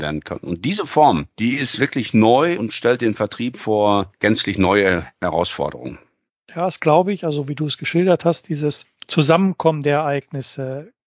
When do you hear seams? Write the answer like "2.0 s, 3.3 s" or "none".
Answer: none